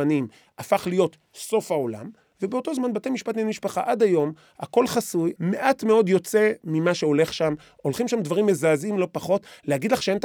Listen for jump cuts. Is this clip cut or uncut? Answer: uncut